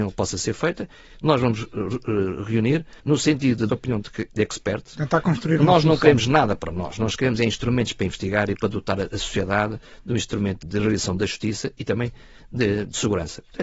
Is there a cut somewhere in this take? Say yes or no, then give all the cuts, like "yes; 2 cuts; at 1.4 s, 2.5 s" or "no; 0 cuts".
yes; 3 cuts; at 3.0 s, 3.7 s, 10.6 s